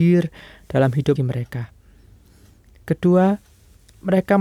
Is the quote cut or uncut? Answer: cut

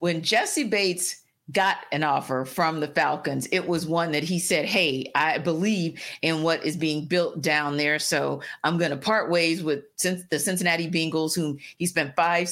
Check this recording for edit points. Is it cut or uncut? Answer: uncut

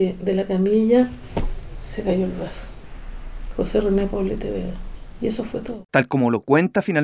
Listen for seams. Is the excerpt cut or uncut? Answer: cut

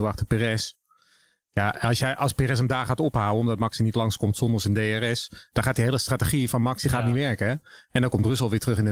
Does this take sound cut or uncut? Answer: uncut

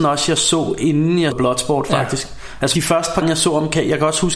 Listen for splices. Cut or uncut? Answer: cut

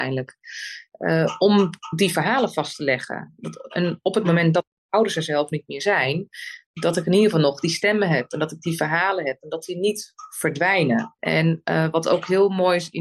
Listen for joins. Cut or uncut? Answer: cut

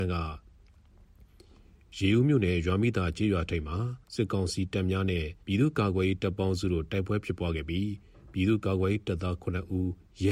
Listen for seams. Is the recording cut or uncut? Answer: cut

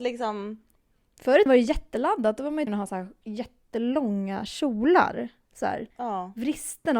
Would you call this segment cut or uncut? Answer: cut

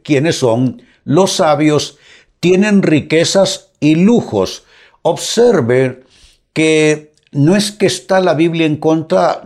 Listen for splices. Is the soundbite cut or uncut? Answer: uncut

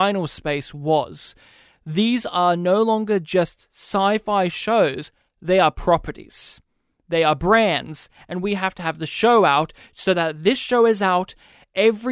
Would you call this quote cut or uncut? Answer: uncut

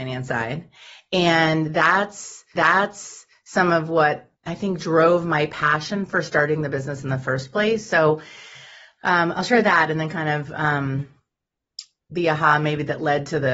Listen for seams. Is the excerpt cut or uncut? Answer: cut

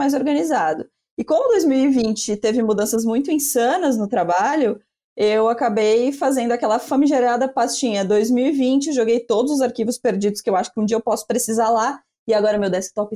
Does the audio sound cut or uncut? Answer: uncut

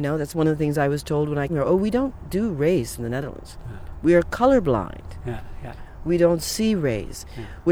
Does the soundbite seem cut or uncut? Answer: cut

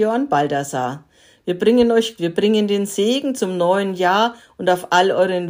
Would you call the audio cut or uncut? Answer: cut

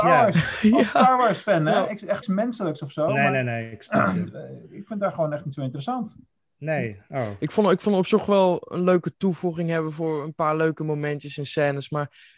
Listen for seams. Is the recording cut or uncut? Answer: cut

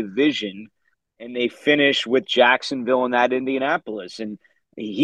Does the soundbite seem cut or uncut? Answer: uncut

